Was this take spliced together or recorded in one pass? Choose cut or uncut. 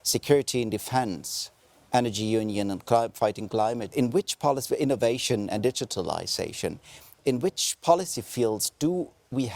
cut